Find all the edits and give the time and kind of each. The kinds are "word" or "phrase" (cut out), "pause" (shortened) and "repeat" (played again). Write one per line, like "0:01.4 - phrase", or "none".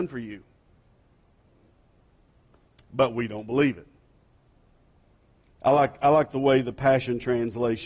none

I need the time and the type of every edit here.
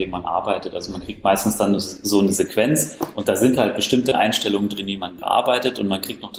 none

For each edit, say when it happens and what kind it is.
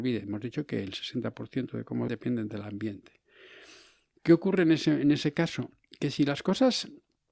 0:02.1 - word

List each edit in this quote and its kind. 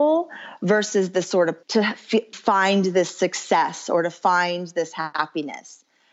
0:01.6 - word
0:02.3 - word

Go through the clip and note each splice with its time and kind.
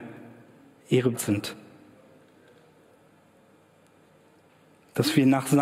0:01.1 - word

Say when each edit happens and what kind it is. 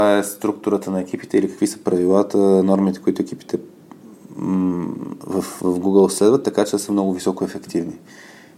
none

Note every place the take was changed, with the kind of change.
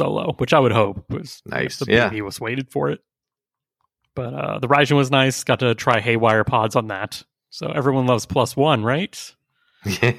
none

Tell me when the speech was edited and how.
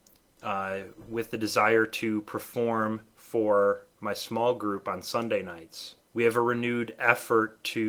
0:03.9 - pause
0:06.0 - pause

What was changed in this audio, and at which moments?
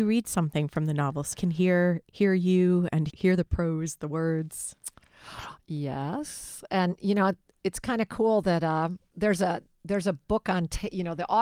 0:01.3 - word
0:03.1 - word
0:09.1 - word

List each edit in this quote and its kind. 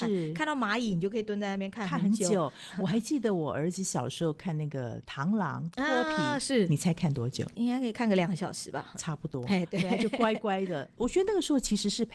none

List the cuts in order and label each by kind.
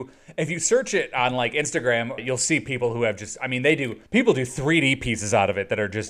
0:02.2 - word
0:04.1 - pause

